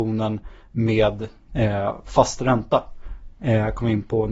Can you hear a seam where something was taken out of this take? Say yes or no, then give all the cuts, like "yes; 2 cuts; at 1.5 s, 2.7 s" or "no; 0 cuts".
no; 0 cuts